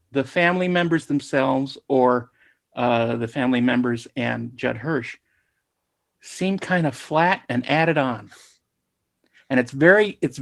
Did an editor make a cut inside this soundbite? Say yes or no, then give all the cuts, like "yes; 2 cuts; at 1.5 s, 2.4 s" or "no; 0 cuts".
no; 0 cuts